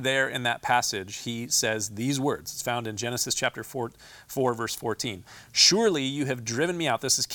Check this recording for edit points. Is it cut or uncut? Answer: uncut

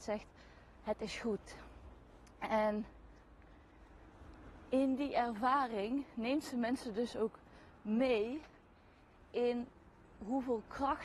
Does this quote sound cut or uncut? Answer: uncut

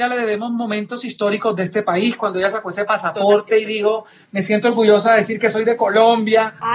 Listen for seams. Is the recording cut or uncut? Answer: uncut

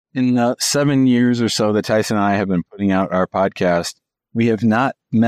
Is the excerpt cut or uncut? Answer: uncut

